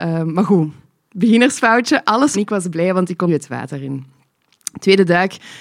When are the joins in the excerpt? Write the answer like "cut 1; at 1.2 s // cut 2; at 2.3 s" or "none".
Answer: cut 1; at 2.3 s // cut 2; at 3.3 s